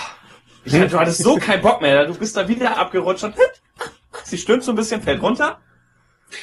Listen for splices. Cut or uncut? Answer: uncut